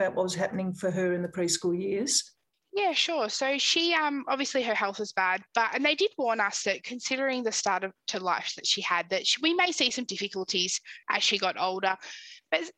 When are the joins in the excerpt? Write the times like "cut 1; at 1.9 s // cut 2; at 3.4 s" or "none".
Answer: cut 1; at 2.5 s // cut 2; at 11.0 s